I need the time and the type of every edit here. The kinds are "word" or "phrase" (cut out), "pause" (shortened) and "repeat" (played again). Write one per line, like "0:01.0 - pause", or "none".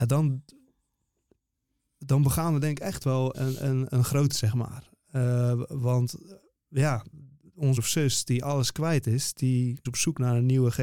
0:03.3 - word
0:04.3 - word
0:07.8 - word
0:09.9 - word